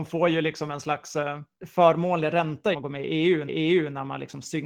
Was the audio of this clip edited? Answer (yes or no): yes